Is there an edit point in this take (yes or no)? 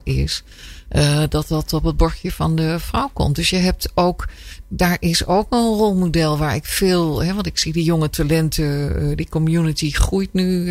yes